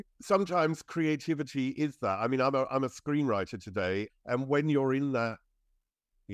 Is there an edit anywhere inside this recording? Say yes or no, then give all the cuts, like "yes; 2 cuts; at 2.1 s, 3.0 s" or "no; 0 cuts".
yes; 1 cut; at 4.1 s